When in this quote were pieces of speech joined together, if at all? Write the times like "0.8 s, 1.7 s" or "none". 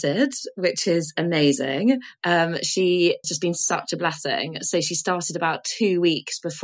3.2 s